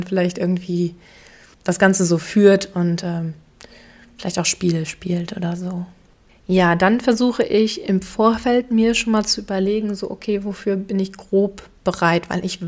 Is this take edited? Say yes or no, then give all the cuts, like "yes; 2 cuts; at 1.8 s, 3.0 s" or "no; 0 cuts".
no; 0 cuts